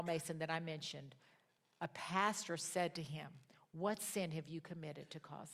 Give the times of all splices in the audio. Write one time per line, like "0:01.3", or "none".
none